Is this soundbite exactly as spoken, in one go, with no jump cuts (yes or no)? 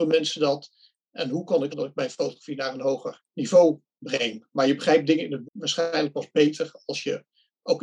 no